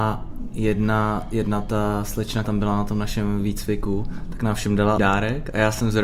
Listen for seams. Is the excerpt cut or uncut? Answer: cut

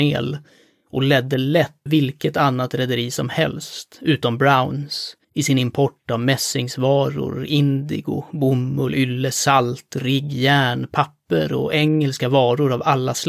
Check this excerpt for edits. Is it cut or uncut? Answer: cut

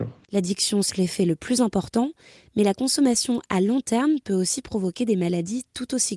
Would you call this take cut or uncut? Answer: cut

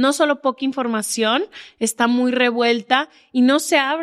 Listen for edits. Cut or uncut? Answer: uncut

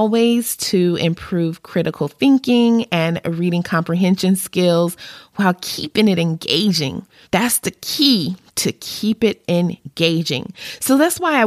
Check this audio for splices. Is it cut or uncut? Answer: cut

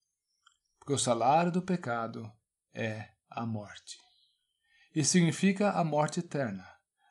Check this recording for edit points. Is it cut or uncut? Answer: uncut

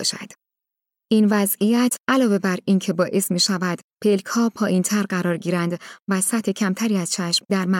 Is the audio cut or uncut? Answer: uncut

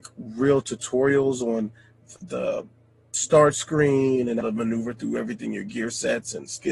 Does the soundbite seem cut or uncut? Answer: cut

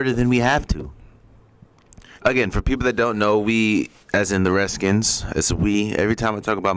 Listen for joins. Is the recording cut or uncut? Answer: cut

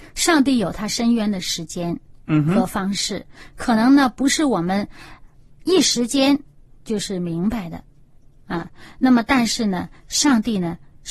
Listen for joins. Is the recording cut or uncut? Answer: uncut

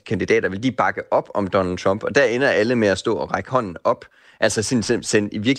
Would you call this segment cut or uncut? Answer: uncut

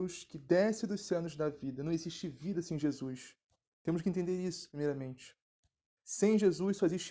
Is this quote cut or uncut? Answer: uncut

